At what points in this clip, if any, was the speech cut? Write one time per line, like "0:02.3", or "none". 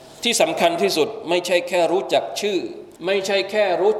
0:03.0